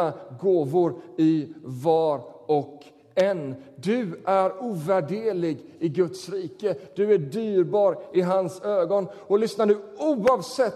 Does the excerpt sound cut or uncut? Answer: uncut